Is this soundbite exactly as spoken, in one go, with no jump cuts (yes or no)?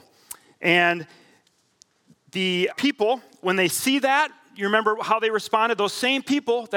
no